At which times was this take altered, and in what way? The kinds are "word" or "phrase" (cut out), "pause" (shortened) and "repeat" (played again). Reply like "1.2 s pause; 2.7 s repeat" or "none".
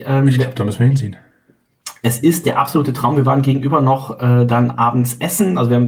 none

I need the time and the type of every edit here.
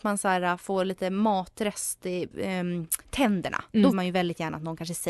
2.3 s word; 3.0 s pause; 3.9 s word

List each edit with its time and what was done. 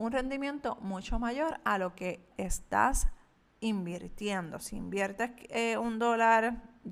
2.3 s word

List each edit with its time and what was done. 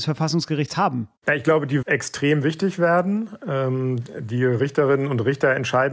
1.2 s pause; 1.8 s word

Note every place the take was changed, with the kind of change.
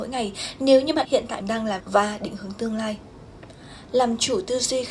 1.1 s word; 1.4 s word; 1.8 s word

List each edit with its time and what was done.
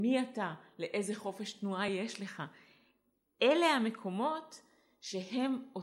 none

